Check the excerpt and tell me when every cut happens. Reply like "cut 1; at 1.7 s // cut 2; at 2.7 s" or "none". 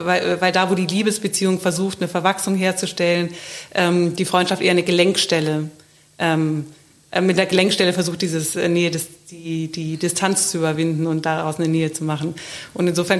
none